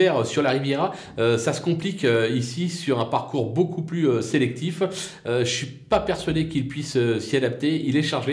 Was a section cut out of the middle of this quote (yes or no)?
no